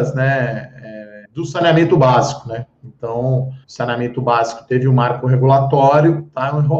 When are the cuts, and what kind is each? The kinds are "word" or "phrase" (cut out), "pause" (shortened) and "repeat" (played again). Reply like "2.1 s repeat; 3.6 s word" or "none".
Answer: 1.2 s pause; 3.6 s pause